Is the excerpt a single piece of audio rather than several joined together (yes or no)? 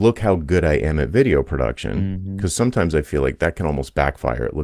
yes